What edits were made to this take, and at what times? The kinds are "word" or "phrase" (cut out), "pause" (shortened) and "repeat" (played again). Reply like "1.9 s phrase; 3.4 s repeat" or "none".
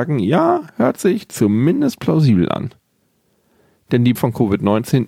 4.2 s word